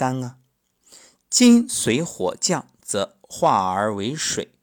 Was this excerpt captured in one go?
yes; 0 cuts

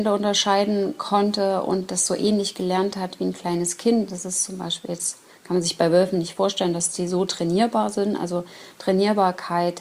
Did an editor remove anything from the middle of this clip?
no; 0 cuts

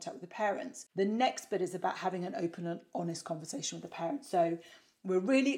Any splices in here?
no; 0 cuts

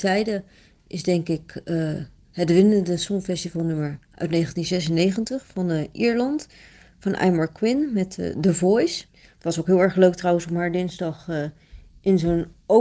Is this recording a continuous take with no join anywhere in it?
no; 1 cut; at 9.1 s

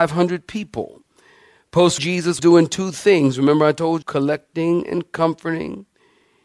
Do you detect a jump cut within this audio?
yes; 3 cuts; at 2.0 s, 2.4 s, 4.0 s

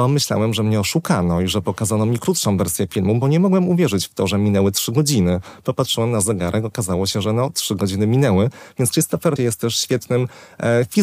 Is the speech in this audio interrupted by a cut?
yes; 1 cut; at 9.4 s

